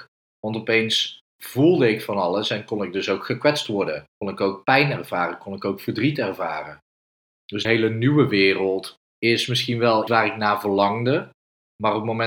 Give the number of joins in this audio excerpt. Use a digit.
4